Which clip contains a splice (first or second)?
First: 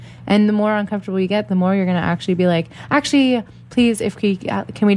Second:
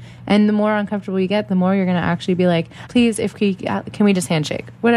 second